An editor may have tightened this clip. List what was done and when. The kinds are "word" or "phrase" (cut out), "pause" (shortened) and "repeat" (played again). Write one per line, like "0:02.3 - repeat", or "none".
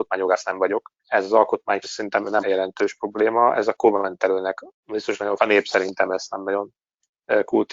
0:01.0 - pause
0:01.8 - word
0:02.4 - word
0:04.7 - pause
0:05.4 - phrase

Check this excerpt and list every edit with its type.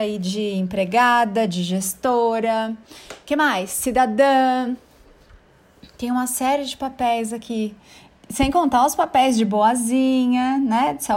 none

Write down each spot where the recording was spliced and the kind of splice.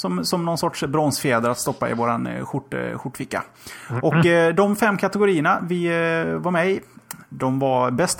none

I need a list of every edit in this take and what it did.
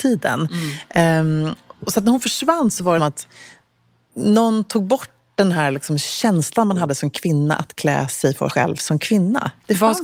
0:03.0 - phrase
0:08.5 - word

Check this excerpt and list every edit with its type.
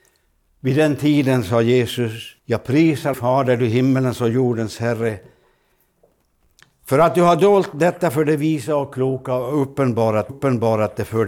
0:02.4 - pause
0:03.1 - word
0:10.3 - repeat

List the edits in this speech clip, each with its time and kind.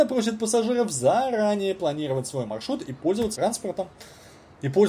0:03.4 - word

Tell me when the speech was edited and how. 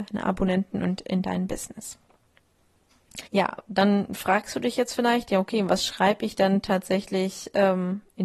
0:03.3 - pause

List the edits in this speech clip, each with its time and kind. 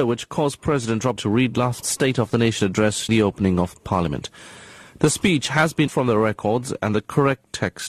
0:01.2 - word
0:01.8 - word
0:03.1 - word
0:05.9 - word

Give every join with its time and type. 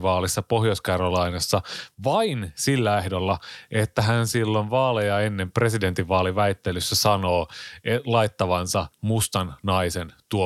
0:08.9 - pause

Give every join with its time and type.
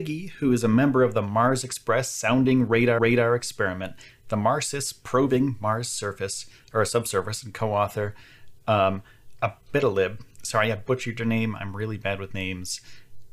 0:03.0 - repeat
0:10.3 - pause

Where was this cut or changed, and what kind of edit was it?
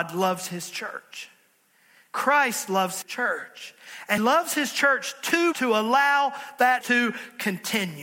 0:03.0 - word
0:04.2 - word
0:05.5 - word
0:06.8 - word

